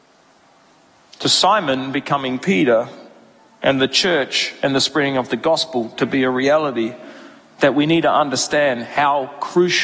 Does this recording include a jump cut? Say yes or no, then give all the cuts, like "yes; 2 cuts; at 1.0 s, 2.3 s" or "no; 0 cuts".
no; 0 cuts